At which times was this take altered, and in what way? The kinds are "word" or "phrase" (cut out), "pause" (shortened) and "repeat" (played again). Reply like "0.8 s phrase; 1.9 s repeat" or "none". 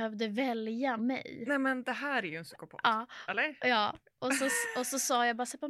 1.0 s phrase